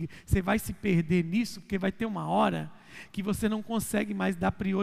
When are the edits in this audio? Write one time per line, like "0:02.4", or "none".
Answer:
none